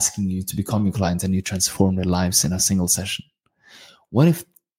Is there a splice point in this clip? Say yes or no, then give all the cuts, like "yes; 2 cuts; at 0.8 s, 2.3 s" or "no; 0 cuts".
no; 0 cuts